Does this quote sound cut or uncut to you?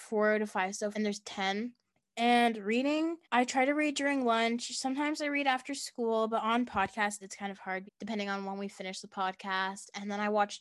cut